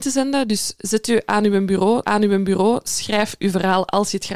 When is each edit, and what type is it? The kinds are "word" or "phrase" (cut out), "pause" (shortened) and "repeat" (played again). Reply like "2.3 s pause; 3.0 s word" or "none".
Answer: 2.0 s repeat